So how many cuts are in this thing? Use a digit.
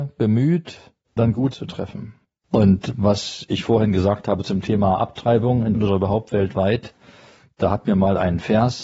4